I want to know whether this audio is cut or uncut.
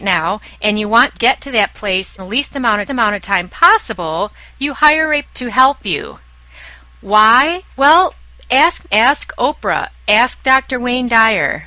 cut